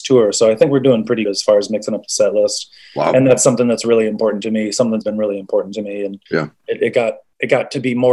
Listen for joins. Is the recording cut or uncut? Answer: cut